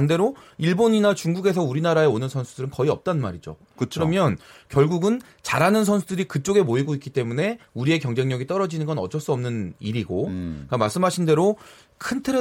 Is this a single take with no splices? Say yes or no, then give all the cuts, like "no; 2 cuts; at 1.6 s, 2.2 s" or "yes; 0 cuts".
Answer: yes; 0 cuts